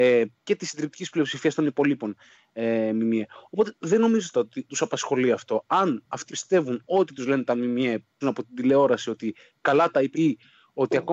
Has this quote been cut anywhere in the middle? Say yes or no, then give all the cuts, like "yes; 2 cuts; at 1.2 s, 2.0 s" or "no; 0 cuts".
yes; 5 cuts; at 4.3 s, 4.7 s, 6.3 s, 8.2 s, 10.1 s